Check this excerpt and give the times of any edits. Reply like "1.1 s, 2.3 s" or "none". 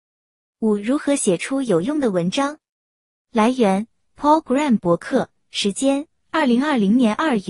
none